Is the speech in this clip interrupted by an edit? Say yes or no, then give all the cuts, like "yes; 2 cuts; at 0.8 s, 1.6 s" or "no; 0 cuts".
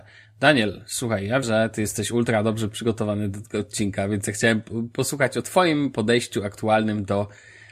yes; 1 cut; at 1.4 s